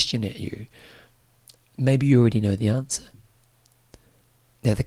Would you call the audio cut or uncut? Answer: uncut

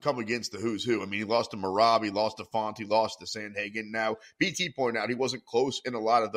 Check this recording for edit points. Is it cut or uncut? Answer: uncut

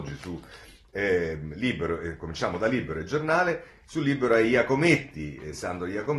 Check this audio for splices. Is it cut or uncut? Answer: uncut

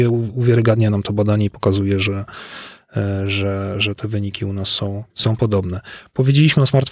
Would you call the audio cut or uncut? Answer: cut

